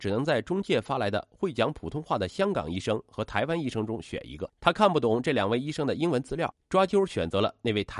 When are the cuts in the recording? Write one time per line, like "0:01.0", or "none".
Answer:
0:04.5
0:06.6